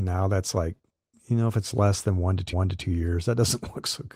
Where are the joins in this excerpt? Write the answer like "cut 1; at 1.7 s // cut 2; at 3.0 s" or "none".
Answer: cut 1; at 2.5 s